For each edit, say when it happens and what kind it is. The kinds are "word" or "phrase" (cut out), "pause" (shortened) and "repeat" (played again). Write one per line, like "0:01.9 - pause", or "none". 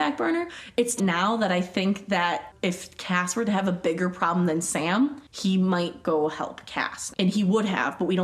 0:01.0 - phrase
0:07.1 - word